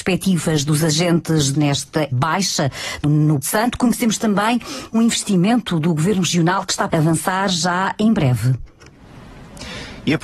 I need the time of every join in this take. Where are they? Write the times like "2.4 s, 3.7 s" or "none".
1.5 s, 2.1 s, 3.0 s, 3.4 s, 4.9 s, 6.9 s

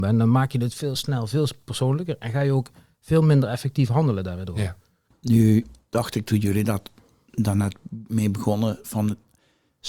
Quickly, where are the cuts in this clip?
none

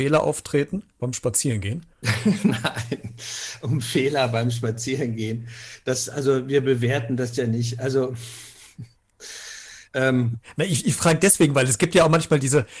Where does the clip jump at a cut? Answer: 0.9 s, 1.9 s, 9.9 s

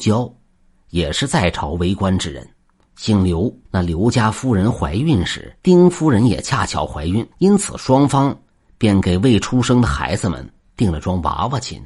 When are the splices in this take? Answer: 3.7 s, 5.6 s, 7.3 s

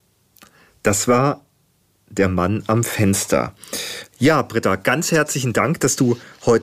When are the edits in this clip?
none

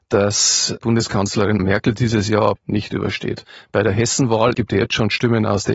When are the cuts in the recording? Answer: 1.6 s, 2.6 s, 4.5 s

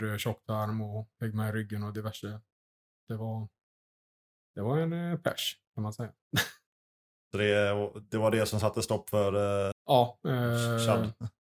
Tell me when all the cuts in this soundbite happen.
9.7 s

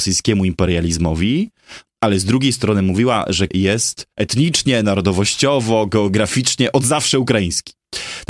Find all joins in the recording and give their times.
3.5 s, 4.1 s

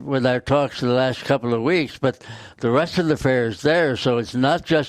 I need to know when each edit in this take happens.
none

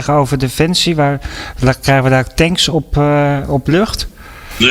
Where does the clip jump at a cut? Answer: none

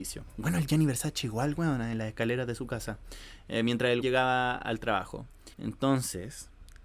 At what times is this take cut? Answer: 4.0 s, 5.5 s

